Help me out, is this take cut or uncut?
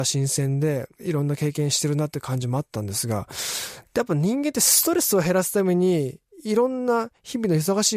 cut